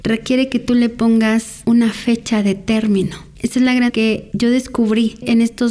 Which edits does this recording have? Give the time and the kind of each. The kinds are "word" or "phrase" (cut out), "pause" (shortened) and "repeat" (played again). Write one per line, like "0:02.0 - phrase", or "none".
0:03.9 - word